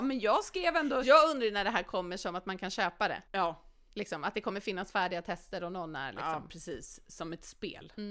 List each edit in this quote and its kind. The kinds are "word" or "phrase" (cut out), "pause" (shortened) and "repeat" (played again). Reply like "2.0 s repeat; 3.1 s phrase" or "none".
3.3 s pause